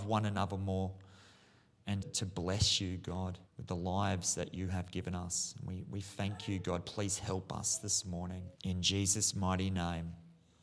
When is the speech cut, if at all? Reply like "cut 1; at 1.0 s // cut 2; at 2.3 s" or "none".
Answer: cut 1; at 2.0 s // cut 2; at 3.5 s // cut 3; at 8.5 s